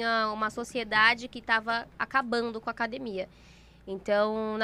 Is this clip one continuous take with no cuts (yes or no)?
yes